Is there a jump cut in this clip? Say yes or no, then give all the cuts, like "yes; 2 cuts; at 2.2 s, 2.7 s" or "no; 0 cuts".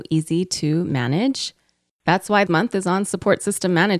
yes; 1 cut; at 2.5 s